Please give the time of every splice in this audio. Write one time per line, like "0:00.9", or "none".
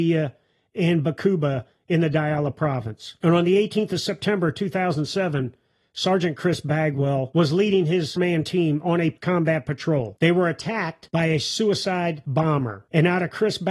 0:07.3
0:08.2